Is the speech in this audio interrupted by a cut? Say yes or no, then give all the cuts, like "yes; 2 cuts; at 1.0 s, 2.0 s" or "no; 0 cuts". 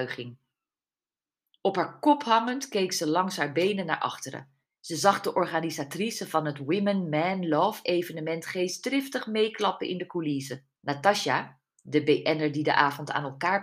yes; 2 cuts; at 4.7 s, 10.8 s